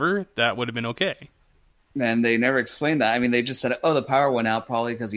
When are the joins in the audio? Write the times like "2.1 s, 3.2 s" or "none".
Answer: 1.7 s